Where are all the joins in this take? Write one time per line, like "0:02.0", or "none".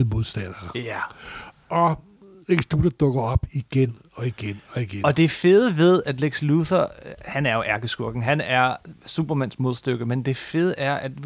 none